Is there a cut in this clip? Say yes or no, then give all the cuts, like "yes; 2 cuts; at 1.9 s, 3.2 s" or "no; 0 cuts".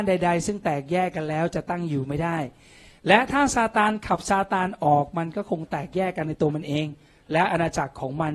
no; 0 cuts